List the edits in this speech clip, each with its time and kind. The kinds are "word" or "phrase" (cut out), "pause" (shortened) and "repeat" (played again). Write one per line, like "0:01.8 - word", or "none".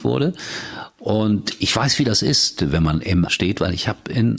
0:03.3 - word